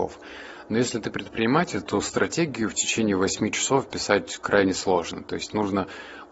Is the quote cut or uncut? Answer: uncut